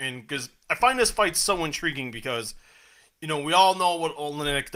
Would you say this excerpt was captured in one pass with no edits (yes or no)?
yes